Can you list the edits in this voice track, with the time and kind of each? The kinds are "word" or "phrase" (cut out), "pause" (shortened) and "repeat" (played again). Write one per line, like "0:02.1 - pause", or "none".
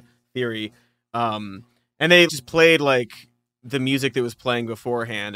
0:02.3 - word